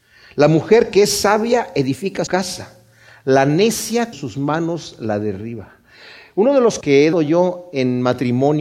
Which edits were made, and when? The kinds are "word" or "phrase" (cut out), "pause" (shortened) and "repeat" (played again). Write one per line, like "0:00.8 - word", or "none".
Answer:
0:02.3 - word
0:04.1 - word
0:06.8 - word
0:07.1 - word